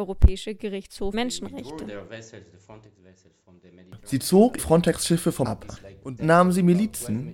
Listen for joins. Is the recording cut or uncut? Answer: cut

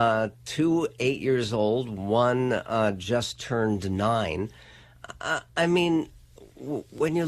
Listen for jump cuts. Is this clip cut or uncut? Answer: uncut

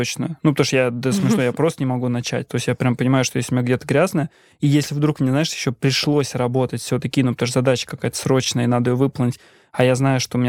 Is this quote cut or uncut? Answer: uncut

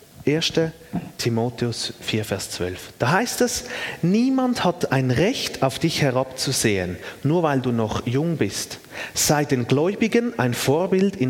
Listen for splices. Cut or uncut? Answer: uncut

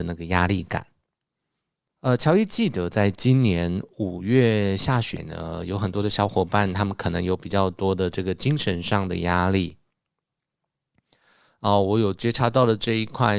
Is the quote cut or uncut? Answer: uncut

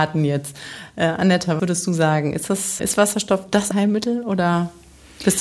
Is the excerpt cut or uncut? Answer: cut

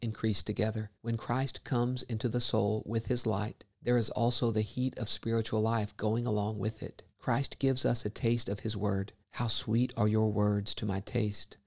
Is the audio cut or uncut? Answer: cut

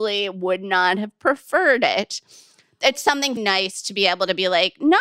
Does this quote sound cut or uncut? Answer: cut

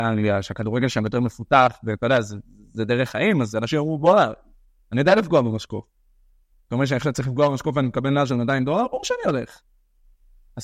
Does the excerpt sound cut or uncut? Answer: uncut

